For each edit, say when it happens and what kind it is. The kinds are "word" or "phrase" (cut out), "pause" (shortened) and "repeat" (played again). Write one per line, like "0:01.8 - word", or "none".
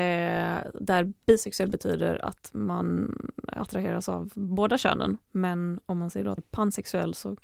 0:05.2 - pause
0:06.4 - word